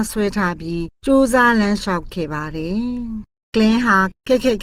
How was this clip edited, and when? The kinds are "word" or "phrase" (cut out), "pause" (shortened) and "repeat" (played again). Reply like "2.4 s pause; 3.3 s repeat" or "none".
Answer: 0.9 s pause